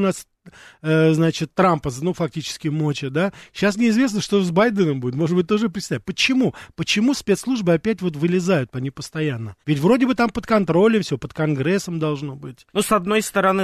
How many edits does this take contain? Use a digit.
2